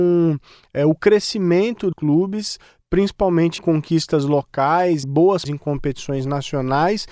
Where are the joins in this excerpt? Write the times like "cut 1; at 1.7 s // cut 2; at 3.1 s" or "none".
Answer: cut 1; at 1.9 s // cut 2; at 3.6 s // cut 3; at 5.0 s // cut 4; at 5.4 s